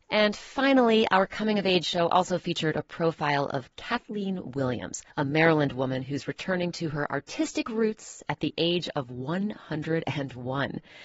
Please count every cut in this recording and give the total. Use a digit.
1